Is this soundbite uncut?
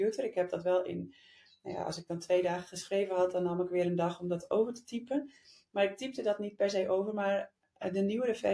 yes; 0 cuts

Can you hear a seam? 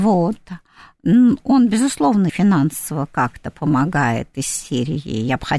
yes; 1 cut; at 2.3 s

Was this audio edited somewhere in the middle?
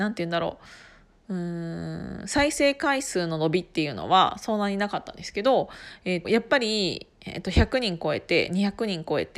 yes; 1 cut; at 6.2 s

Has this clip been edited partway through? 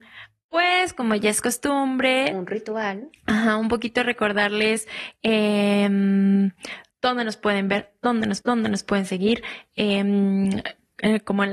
yes; 1 cut; at 8.4 s

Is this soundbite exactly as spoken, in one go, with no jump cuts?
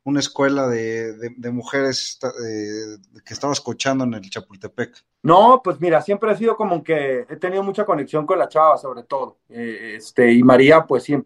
no; 1 cut; at 5.1 s

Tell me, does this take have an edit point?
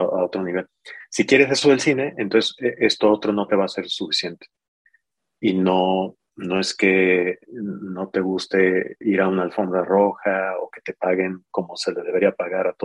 no; 0 cuts

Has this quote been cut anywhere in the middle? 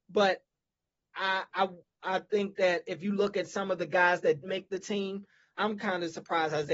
yes; 2 cuts; at 4.4 s, 5.5 s

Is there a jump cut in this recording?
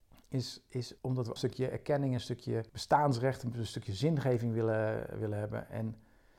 yes; 3 cuts; at 1.0 s, 1.4 s, 2.7 s

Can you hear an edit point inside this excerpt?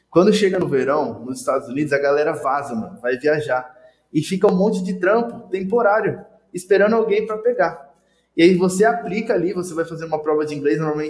no; 0 cuts

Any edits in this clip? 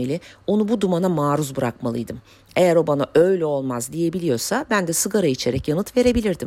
no; 0 cuts

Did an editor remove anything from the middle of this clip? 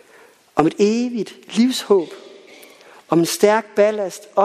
no; 0 cuts

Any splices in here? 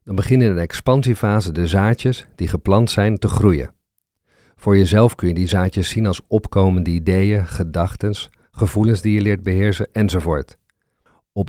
no; 0 cuts

